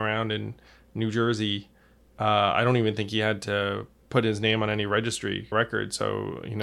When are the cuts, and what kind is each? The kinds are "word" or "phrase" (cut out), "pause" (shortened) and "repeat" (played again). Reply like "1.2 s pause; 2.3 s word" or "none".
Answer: 5.5 s word